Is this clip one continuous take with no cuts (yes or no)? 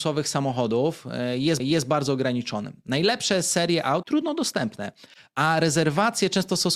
no